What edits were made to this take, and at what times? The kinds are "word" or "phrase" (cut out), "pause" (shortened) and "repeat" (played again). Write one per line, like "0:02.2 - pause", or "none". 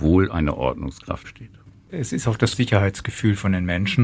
0:01.2 - word
0:02.5 - word